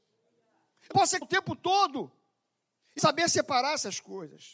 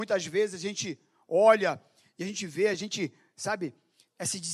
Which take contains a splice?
first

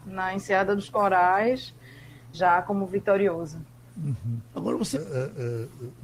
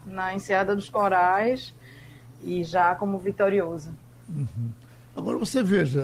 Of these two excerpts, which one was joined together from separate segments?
first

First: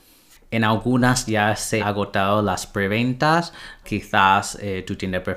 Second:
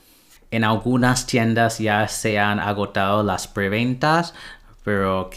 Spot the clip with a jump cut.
first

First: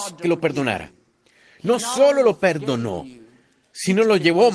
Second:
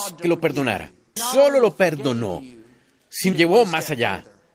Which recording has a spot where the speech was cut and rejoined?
second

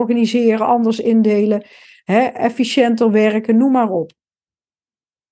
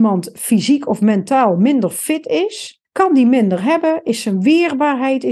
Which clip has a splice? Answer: second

